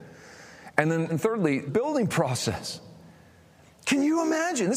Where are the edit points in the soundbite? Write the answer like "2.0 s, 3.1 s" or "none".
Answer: 1.1 s, 1.7 s